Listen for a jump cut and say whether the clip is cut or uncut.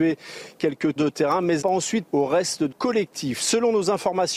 cut